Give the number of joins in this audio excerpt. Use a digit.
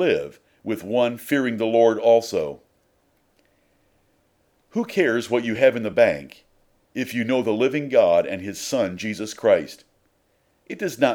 0